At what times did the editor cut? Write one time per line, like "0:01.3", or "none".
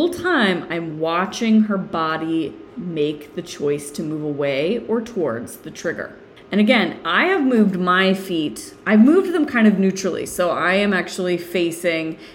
none